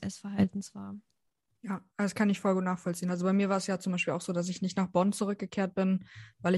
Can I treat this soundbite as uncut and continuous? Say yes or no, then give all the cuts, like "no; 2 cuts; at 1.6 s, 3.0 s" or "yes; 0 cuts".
yes; 0 cuts